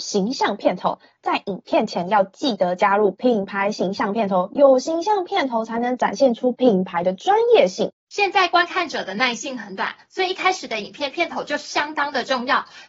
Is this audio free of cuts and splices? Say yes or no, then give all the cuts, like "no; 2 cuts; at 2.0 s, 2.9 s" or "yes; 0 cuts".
yes; 0 cuts